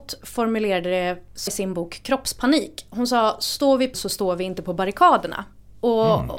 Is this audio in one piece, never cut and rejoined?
no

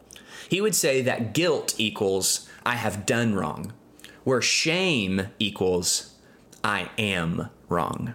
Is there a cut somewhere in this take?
no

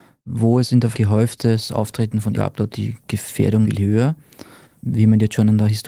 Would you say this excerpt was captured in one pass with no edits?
no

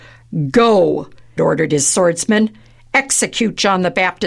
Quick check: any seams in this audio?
yes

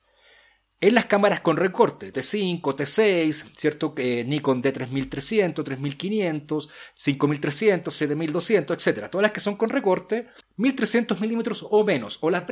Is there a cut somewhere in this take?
yes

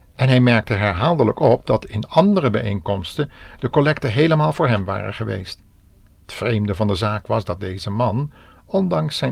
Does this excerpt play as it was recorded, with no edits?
yes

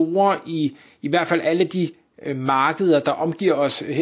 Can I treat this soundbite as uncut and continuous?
yes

